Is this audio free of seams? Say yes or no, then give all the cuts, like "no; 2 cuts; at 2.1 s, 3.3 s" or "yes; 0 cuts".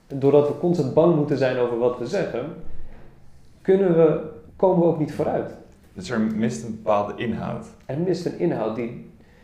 no; 2 cuts; at 4.5 s, 5.8 s